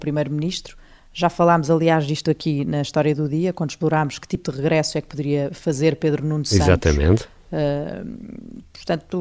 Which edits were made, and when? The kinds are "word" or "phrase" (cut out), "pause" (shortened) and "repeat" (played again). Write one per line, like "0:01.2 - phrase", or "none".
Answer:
none